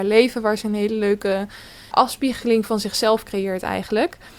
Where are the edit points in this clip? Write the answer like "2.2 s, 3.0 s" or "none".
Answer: 1.9 s